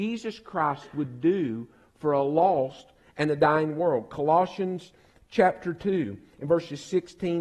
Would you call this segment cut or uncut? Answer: uncut